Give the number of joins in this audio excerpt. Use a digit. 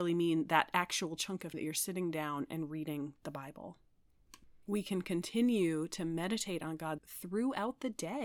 3